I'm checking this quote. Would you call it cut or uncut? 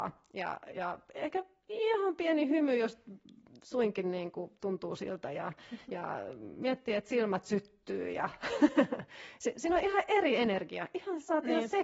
uncut